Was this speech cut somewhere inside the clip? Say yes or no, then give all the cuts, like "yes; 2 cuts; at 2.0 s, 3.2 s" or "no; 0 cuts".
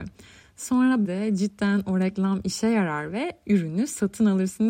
yes; 1 cut; at 1.0 s